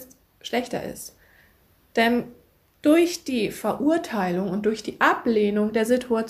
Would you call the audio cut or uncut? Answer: uncut